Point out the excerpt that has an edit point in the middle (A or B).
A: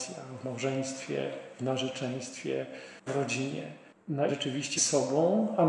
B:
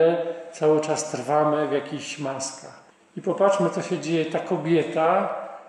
A